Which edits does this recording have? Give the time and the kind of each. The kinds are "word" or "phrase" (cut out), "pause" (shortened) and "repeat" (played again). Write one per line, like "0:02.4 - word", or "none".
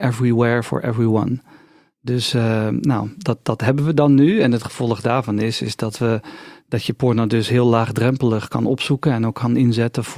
none